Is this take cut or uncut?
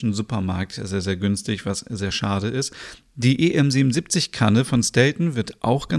uncut